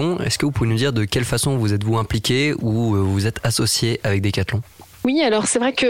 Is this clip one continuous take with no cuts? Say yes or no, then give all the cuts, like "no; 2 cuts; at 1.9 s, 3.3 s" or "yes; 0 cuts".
yes; 0 cuts